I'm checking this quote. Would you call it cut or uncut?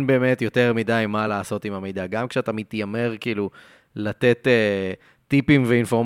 uncut